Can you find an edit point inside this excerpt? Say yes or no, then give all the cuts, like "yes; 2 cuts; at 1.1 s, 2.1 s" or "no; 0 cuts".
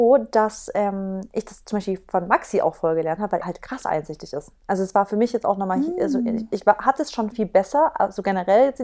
yes; 2 cuts; at 3.4 s, 7.3 s